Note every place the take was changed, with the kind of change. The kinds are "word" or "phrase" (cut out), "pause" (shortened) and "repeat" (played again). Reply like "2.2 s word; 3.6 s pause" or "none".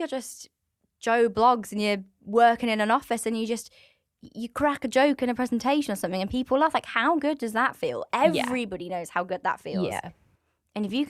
none